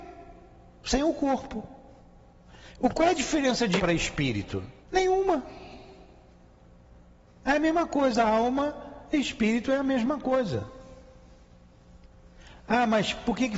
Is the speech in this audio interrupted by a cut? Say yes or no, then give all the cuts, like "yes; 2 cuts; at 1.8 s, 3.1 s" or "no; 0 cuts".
yes; 2 cuts; at 3.8 s, 4.8 s